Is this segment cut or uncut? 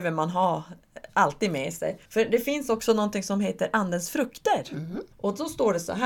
cut